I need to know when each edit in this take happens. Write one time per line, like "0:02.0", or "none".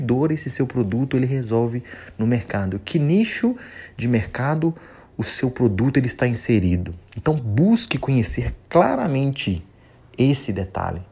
none